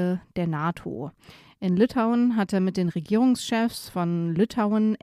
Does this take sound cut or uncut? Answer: uncut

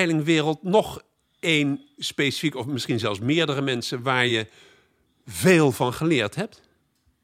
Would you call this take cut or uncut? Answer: uncut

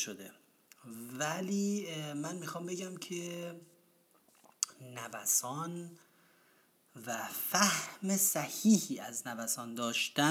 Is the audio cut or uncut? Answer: uncut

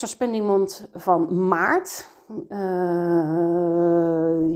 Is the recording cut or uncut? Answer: uncut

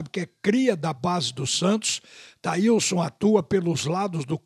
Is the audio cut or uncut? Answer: uncut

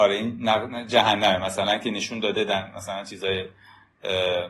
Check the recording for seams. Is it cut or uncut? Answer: uncut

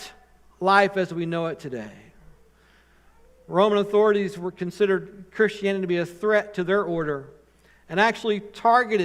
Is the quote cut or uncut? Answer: uncut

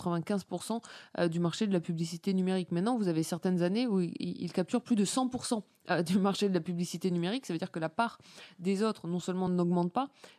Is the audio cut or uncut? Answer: uncut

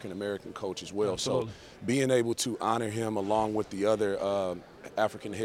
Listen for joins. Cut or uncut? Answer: uncut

